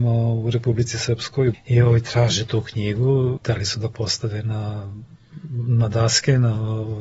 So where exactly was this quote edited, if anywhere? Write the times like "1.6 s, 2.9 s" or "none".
1.5 s